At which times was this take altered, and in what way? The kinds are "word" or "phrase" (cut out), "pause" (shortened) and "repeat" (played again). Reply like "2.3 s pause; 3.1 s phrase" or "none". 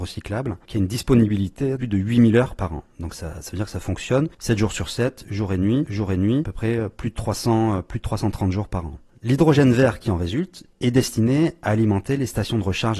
1.8 s word; 2.6 s word; 3.1 s word; 5.8 s repeat